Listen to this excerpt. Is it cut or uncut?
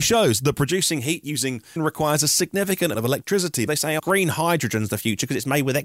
cut